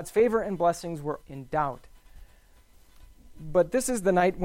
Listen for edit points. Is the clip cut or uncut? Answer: cut